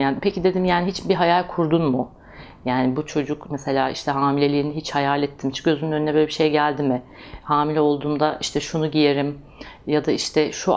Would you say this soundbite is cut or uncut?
cut